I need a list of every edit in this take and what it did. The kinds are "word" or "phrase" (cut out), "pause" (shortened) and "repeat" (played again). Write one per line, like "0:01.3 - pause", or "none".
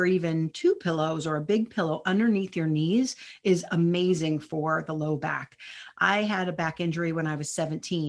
none